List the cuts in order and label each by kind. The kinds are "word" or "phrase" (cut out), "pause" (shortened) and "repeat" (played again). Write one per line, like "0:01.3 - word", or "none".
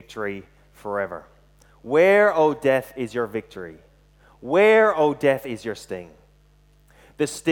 none